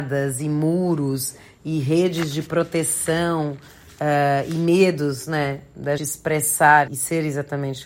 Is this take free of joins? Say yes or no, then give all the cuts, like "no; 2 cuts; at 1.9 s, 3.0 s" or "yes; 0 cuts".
no; 2 cuts; at 6.0 s, 6.9 s